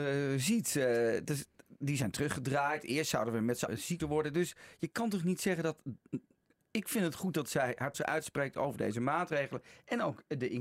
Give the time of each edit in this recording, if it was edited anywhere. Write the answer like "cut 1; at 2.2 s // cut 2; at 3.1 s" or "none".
cut 1; at 3.7 s // cut 2; at 4.0 s // cut 3; at 7.9 s

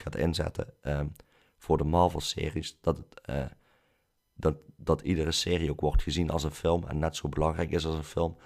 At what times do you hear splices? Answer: none

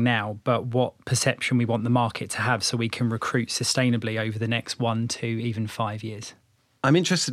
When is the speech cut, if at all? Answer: none

